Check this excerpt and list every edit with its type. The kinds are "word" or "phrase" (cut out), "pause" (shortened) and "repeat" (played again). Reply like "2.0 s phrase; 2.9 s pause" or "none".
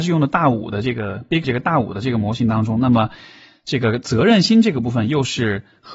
1.4 s word